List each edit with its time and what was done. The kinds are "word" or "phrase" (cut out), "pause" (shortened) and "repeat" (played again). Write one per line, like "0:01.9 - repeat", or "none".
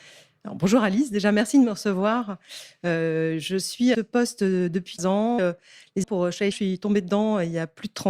0:03.9 - phrase
0:05.0 - word
0:05.4 - phrase
0:06.0 - word
0:06.5 - word